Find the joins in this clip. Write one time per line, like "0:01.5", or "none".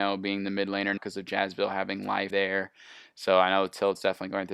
0:01.0
0:02.3